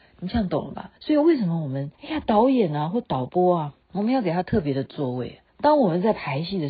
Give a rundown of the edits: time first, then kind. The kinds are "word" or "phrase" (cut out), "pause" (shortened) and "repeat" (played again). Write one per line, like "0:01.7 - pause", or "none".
0:01.0 - pause
0:01.9 - pause
0:03.8 - pause
0:05.5 - pause